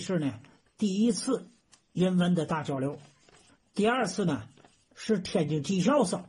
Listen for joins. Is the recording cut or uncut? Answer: uncut